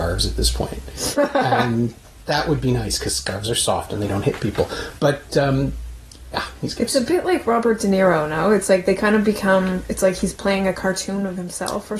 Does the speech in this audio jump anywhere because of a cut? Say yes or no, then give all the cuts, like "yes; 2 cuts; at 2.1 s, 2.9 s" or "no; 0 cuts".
no; 0 cuts